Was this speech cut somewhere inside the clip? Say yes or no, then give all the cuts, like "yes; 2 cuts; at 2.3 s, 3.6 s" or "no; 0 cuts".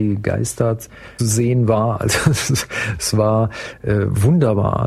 yes; 1 cut; at 1.2 s